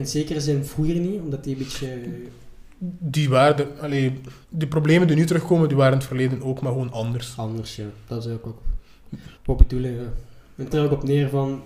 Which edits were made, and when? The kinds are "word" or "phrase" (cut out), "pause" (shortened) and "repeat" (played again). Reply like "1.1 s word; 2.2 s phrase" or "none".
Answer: 4.4 s pause; 9.3 s pause; 10.7 s word